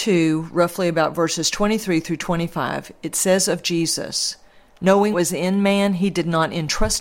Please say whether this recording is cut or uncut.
cut